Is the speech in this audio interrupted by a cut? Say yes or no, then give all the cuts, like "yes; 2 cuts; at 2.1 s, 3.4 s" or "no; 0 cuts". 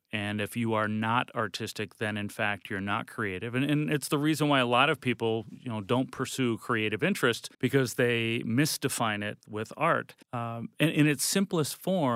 yes; 3 cuts; at 7.5 s, 9.4 s, 10.2 s